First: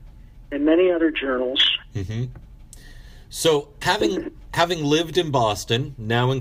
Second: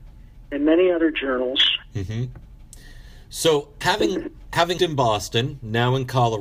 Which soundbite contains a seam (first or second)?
second